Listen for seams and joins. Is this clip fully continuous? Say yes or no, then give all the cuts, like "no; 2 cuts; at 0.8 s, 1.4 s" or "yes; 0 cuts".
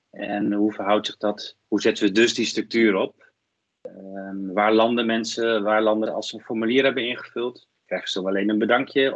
no; 3 cuts; at 1.6 s, 6.1 s, 7.8 s